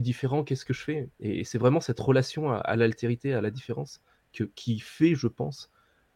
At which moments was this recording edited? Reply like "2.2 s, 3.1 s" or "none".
none